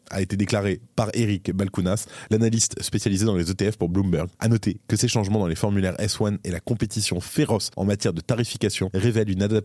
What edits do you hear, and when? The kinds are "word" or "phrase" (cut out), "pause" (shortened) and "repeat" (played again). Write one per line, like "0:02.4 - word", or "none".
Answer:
none